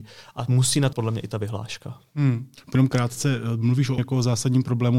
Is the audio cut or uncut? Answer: cut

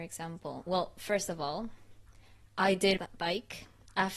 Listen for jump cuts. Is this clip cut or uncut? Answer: cut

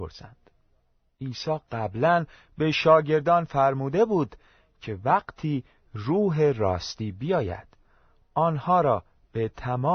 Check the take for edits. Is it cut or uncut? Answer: uncut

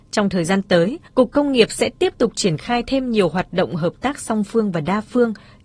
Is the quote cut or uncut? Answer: cut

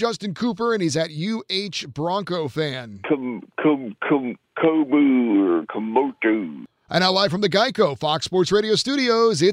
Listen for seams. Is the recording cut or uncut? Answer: uncut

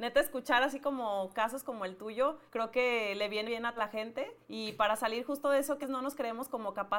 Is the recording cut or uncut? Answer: cut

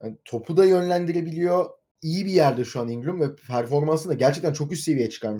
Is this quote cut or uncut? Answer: uncut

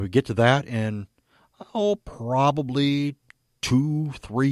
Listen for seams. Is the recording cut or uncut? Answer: uncut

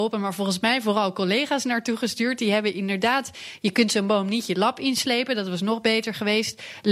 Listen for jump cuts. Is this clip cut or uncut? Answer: uncut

